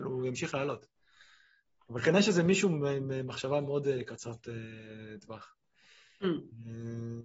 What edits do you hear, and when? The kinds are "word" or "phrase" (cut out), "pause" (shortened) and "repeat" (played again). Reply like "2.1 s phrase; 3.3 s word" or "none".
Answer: none